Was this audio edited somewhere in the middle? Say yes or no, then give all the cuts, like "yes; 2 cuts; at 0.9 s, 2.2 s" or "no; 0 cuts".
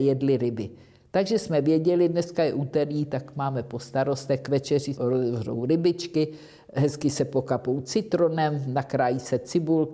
yes; 1 cut; at 5.0 s